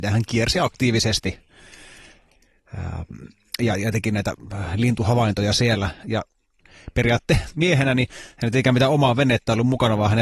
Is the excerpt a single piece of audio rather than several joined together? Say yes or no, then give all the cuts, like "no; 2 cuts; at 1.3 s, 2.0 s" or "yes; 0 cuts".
yes; 0 cuts